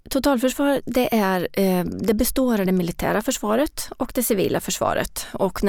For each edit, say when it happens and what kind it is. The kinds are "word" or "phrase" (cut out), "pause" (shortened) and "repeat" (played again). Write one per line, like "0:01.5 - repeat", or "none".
none